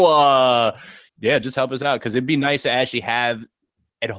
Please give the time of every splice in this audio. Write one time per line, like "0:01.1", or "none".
0:01.1